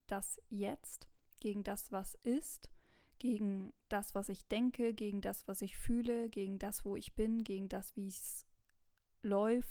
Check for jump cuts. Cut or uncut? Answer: uncut